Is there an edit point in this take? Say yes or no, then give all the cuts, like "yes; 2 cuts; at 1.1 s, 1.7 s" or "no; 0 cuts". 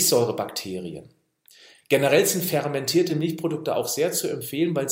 no; 0 cuts